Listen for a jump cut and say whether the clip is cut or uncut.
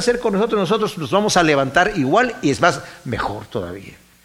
uncut